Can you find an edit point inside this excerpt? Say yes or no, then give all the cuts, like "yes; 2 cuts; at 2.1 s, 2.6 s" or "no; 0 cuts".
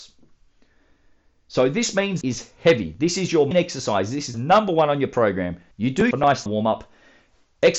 yes; 6 cuts; at 2.2 s, 3.5 s, 4.3 s, 5.7 s, 6.1 s, 6.5 s